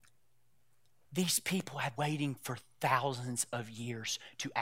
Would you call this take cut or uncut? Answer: cut